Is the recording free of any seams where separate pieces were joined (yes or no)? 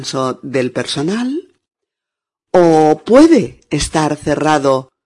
yes